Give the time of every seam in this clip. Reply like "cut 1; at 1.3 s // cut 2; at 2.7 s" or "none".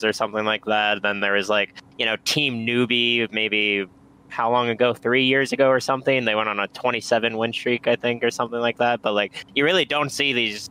none